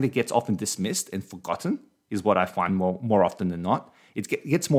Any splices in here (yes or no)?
no